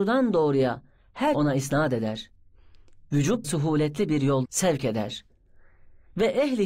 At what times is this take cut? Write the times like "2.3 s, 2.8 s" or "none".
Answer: 1.3 s, 3.4 s, 4.5 s